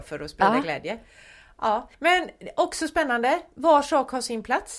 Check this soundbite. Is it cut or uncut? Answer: cut